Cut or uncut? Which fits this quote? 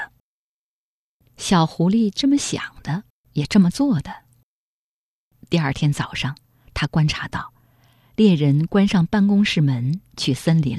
uncut